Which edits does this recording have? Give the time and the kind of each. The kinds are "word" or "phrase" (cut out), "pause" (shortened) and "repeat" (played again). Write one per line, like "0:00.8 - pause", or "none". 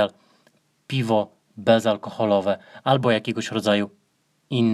none